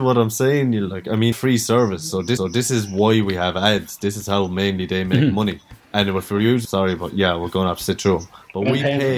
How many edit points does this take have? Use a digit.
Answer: 3